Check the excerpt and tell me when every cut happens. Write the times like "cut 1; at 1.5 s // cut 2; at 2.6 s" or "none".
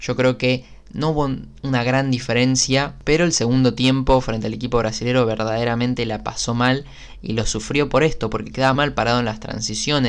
cut 1; at 8.7 s

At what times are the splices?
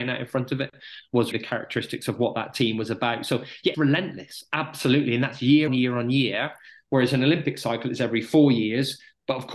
cut 1; at 1.3 s // cut 2; at 3.7 s // cut 3; at 5.7 s

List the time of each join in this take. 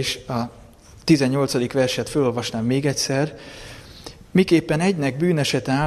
none

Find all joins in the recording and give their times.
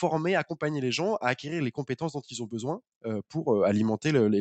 none

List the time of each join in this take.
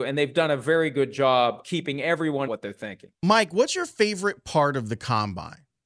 cut 1; at 1.6 s // cut 2; at 2.5 s // cut 3; at 3.1 s

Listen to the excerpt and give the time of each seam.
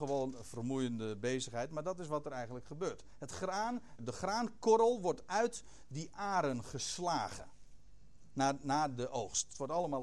cut 1; at 4.0 s

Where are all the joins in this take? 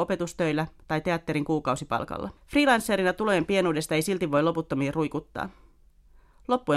cut 1; at 2.4 s

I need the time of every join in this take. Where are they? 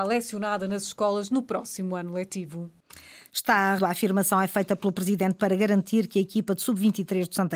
cut 1; at 3.8 s // cut 2; at 5.4 s

